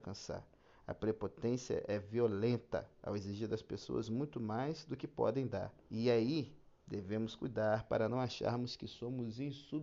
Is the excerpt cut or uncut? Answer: cut